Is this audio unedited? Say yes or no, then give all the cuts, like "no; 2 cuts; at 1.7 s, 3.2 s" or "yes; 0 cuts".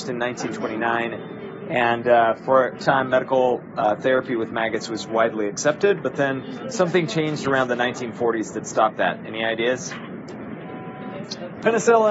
no; 1 cut; at 2.8 s